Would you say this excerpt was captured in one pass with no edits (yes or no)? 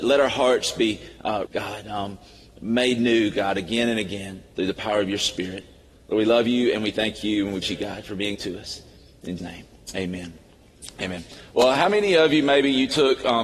no